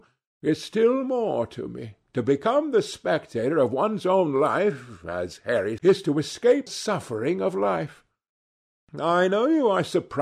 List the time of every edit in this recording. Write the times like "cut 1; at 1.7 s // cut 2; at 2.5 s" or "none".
cut 1; at 2.0 s // cut 2; at 5.8 s // cut 3; at 6.7 s